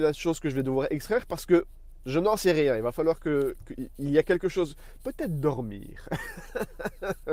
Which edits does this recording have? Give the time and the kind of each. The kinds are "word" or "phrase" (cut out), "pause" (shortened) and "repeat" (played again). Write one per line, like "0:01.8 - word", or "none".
none